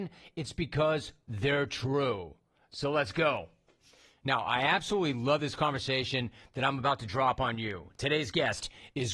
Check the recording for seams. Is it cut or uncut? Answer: uncut